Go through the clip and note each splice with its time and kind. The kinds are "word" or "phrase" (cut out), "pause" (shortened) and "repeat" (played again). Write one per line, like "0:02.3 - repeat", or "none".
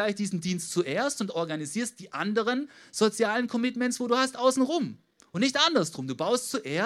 none